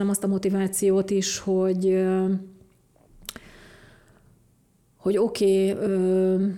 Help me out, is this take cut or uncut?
uncut